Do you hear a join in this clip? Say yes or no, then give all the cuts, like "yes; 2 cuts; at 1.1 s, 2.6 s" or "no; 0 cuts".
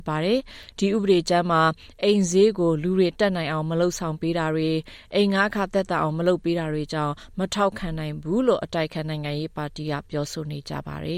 no; 0 cuts